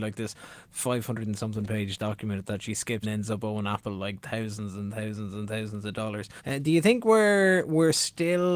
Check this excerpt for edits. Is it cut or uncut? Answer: cut